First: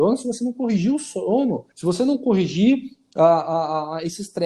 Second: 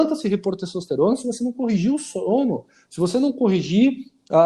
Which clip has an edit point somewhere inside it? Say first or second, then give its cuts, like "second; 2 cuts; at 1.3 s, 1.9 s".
first; 1 cut; at 1.7 s